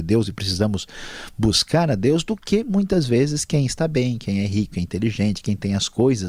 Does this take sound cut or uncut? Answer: uncut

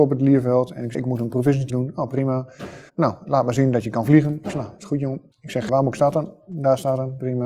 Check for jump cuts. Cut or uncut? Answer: cut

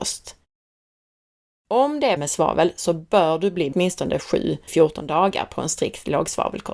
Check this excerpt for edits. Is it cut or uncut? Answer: cut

